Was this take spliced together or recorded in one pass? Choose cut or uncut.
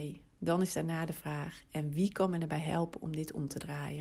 uncut